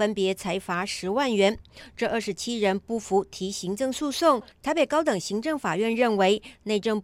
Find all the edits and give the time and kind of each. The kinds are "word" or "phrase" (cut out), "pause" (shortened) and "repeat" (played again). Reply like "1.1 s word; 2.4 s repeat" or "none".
4.5 s pause